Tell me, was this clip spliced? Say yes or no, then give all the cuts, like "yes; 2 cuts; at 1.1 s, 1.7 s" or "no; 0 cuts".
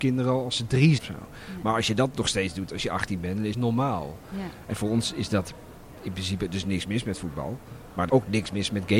yes; 3 cuts; at 1.0 s, 3.5 s, 8.1 s